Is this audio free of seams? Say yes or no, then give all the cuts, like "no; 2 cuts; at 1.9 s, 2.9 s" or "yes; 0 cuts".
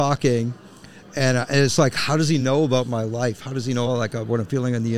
yes; 0 cuts